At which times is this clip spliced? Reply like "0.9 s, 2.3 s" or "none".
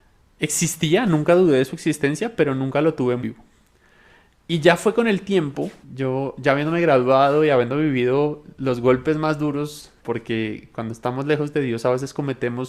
3.2 s, 5.8 s, 10.0 s